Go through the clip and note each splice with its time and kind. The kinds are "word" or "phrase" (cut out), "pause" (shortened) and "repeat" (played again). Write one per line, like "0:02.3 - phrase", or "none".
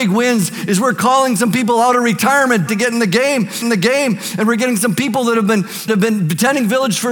0:02.7 - word
0:03.6 - repeat
0:05.9 - word